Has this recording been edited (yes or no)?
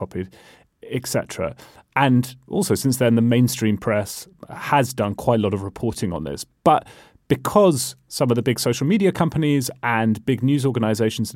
no